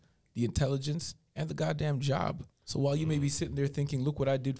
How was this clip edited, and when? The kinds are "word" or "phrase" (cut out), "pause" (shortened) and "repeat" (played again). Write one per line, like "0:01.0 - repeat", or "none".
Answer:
0:02.5 - pause